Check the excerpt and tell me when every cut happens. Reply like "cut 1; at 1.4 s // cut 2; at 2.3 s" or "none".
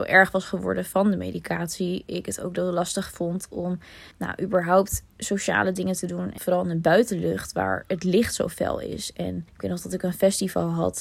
cut 1; at 4.1 s // cut 2; at 6.4 s // cut 3; at 9.5 s